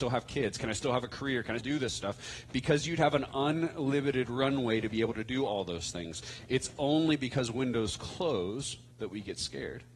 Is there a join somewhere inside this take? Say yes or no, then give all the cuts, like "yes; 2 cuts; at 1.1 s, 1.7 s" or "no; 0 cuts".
yes; 2 cuts; at 1.6 s, 8.9 s